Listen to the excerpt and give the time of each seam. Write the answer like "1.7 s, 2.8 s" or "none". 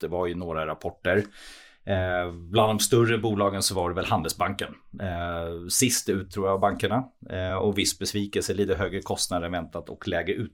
none